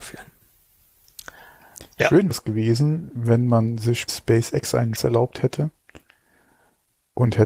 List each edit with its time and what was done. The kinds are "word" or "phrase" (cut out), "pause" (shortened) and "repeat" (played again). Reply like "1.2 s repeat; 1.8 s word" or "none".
2.3 s word; 4.1 s word; 4.9 s word